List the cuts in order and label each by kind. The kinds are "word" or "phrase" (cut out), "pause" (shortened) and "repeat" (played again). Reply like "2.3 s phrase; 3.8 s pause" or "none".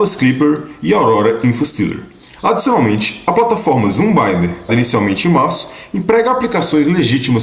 4.7 s word